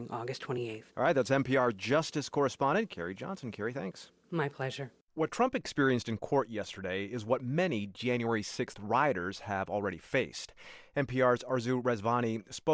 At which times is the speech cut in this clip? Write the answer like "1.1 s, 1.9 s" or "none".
0.9 s, 5.0 s